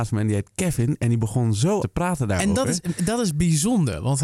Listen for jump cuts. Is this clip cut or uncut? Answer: cut